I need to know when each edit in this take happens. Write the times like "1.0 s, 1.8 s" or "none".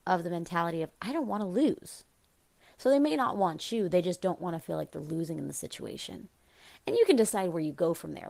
none